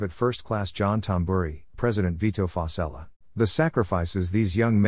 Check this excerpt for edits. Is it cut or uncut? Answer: cut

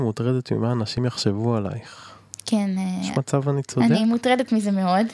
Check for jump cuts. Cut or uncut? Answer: uncut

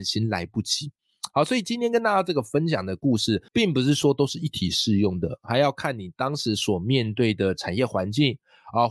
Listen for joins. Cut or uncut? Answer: cut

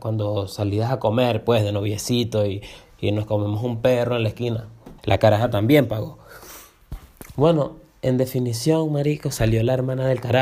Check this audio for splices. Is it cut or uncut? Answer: cut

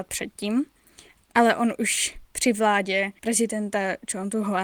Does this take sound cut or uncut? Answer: uncut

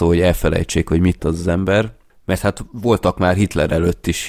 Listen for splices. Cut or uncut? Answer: cut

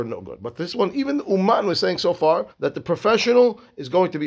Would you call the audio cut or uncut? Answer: cut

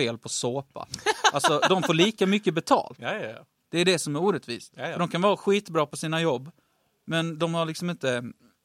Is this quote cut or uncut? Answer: uncut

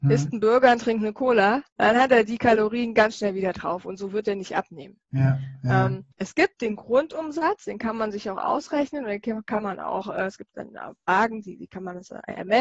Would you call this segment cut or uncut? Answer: cut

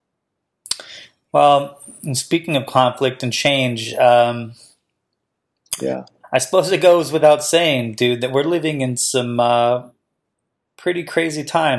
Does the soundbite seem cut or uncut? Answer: uncut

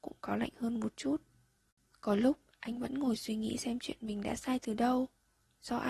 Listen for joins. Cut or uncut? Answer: uncut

